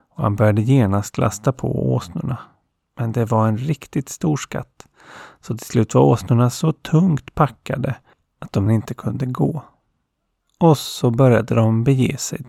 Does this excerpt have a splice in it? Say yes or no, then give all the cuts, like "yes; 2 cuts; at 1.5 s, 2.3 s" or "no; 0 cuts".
yes; 1 cut; at 8.7 s